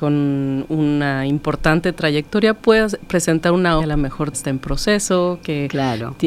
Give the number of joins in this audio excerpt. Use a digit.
2